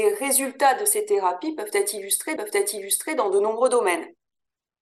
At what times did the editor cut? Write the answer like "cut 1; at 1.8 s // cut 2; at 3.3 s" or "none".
cut 1; at 2.4 s